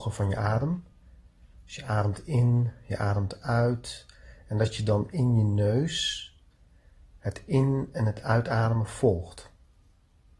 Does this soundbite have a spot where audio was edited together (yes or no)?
no